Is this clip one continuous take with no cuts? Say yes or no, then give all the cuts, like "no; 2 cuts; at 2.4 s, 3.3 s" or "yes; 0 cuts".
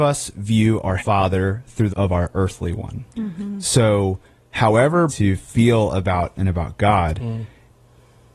no; 5 cuts; at 1.0 s, 1.9 s, 3.1 s, 5.1 s, 6.4 s